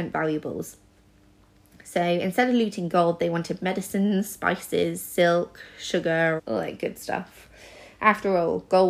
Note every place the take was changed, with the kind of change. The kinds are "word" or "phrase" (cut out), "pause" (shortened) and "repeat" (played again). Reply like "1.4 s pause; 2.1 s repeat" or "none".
6.4 s word